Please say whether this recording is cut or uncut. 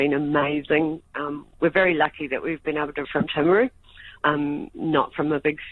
cut